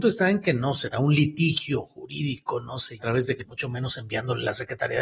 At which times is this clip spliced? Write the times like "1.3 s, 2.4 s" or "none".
0.9 s, 3.0 s, 3.4 s